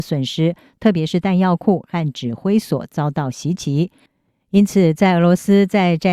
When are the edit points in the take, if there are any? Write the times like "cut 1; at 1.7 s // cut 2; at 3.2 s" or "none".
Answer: none

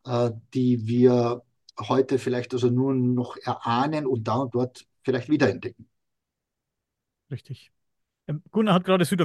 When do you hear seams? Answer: none

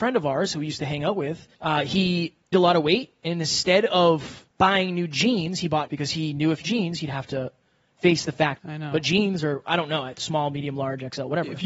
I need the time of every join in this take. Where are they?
cut 1; at 1.5 s // cut 2; at 2.5 s // cut 3; at 4.5 s // cut 4; at 5.9 s // cut 5; at 6.6 s // cut 6; at 8.6 s

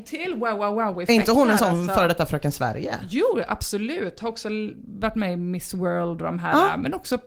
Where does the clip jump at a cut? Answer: none

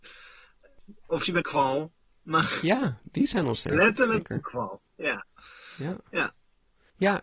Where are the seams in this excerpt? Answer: cut 1; at 1.4 s

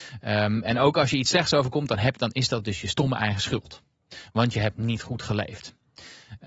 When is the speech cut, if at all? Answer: none

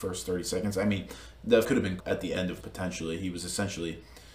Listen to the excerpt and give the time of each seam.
cut 1; at 1.6 s // cut 2; at 2.0 s // cut 3; at 2.6 s

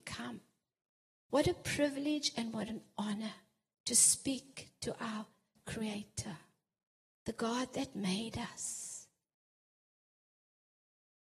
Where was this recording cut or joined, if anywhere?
none

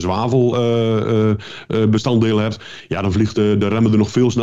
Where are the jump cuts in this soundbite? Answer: none

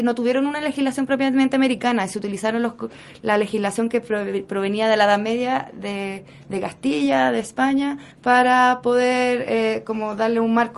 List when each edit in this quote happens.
cut 1; at 8.1 s

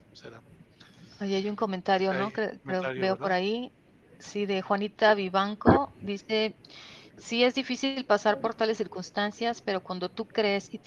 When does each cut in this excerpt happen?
none

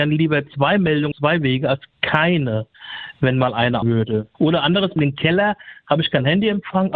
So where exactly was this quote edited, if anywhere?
cut 1; at 1.1 s // cut 2; at 3.8 s // cut 3; at 5.0 s

